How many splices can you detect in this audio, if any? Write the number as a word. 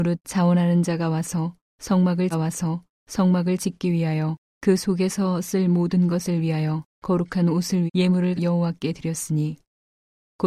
five